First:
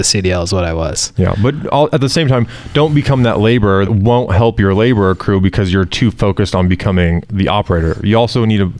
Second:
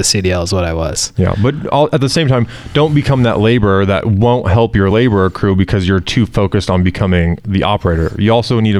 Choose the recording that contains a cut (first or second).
first